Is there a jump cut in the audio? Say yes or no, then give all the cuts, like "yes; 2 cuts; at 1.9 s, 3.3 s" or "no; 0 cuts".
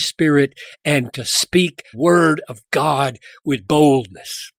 yes; 3 cuts; at 1.1 s, 1.9 s, 3.6 s